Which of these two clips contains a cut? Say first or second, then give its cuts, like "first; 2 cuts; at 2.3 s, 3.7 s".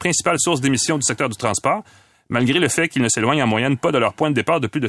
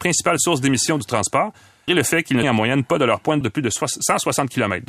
second; 4 cuts; at 1.0 s, 1.9 s, 2.4 s, 3.4 s